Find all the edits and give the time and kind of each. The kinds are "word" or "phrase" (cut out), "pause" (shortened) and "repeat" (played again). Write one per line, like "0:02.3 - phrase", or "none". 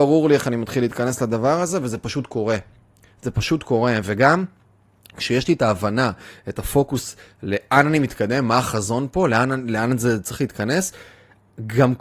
none